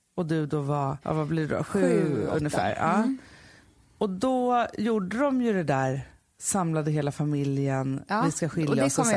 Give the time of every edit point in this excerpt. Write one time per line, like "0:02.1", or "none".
none